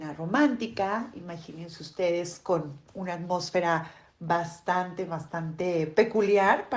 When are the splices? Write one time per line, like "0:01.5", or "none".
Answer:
0:02.9